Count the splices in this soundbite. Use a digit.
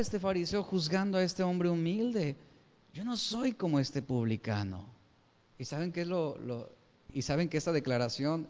1